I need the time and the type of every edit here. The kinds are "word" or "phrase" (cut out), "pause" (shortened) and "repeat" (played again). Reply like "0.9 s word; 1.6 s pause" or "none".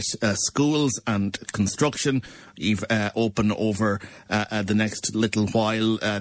none